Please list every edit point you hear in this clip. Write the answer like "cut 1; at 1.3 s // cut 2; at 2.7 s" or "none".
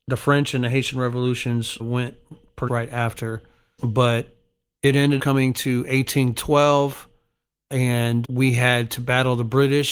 cut 1; at 1.8 s // cut 2; at 2.7 s // cut 3; at 3.8 s // cut 4; at 5.2 s // cut 5; at 8.2 s